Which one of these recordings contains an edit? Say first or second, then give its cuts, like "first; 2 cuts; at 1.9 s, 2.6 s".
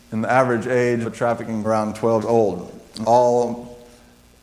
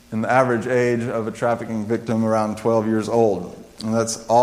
first; 4 cuts; at 1.0 s, 1.6 s, 2.2 s, 3.0 s